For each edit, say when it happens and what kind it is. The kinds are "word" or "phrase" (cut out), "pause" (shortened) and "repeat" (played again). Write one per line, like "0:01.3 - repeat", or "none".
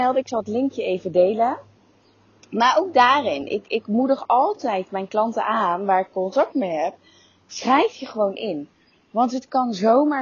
none